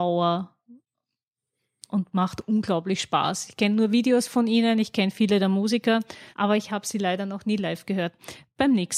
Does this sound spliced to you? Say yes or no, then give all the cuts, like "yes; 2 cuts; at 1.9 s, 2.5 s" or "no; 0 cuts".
yes; 1 cut; at 6.3 s